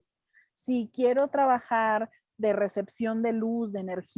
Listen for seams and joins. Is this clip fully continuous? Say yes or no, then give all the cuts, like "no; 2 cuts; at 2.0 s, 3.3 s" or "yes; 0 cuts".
yes; 0 cuts